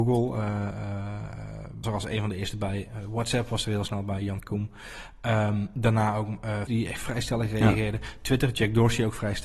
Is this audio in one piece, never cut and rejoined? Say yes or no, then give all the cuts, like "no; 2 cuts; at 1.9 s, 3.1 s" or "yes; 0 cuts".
no; 2 cuts; at 1.8 s, 6.7 s